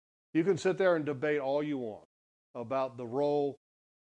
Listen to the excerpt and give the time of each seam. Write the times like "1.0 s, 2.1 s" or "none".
none